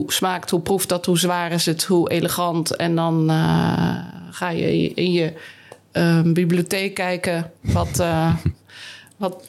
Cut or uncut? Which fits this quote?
cut